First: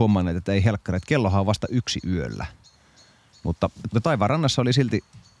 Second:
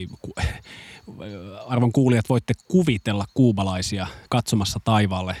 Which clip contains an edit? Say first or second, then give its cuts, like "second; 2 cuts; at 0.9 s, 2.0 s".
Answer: second; 1 cut; at 4.3 s